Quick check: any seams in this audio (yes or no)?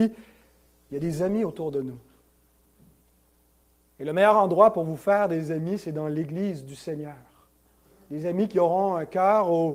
no